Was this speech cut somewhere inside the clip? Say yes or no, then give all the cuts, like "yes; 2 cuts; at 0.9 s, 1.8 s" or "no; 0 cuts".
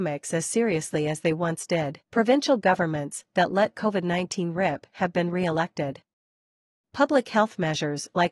yes; 1 cut; at 2.0 s